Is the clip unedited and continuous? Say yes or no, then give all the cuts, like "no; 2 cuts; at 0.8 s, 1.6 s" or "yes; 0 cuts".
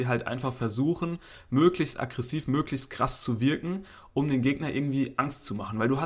yes; 0 cuts